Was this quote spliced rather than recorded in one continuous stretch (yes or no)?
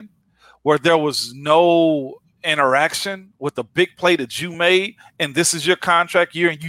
no